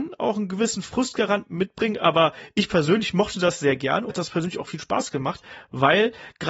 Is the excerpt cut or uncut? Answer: cut